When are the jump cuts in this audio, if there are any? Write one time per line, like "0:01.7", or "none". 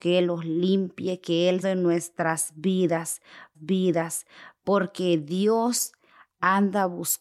0:01.6
0:03.5